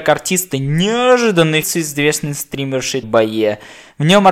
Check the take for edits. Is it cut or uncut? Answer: cut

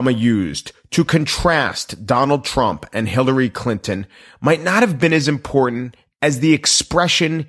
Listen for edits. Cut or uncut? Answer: uncut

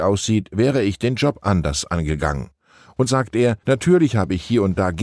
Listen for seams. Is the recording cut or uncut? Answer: cut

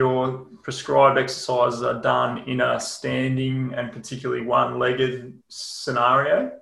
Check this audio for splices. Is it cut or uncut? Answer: cut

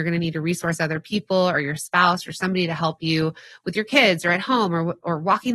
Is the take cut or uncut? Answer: uncut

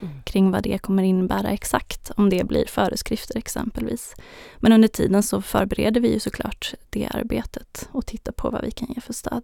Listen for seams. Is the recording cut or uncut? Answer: uncut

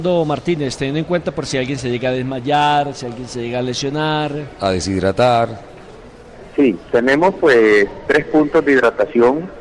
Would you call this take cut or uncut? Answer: uncut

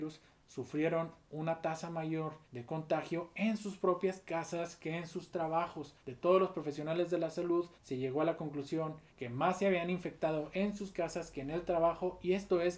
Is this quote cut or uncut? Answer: cut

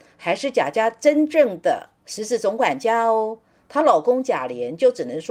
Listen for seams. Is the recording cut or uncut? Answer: uncut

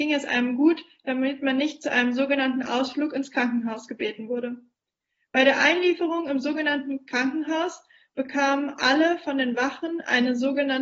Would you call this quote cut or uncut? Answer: uncut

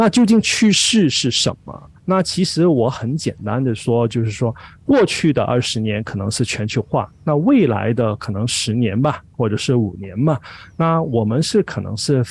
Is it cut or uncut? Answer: cut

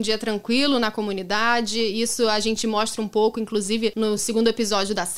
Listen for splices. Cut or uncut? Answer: uncut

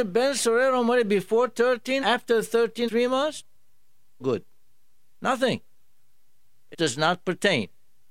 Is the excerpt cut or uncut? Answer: cut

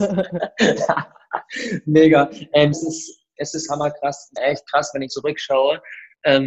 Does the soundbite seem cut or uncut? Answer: cut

